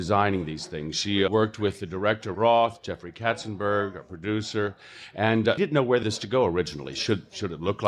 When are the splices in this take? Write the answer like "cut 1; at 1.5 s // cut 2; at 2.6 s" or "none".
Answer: cut 1; at 1.3 s // cut 2; at 2.3 s // cut 3; at 5.6 s // cut 4; at 6.0 s